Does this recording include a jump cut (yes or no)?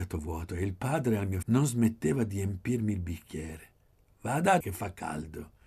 yes